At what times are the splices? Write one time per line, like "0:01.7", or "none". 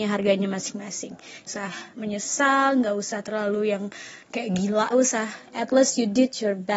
0:01.5
0:01.9
0:04.9